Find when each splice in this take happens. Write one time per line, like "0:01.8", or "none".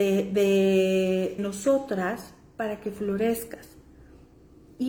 0:01.4